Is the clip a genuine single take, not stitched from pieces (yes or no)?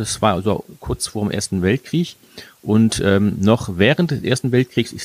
yes